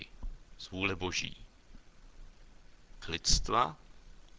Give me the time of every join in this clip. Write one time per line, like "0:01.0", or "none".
0:03.0